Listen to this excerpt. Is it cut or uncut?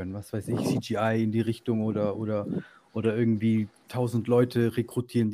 cut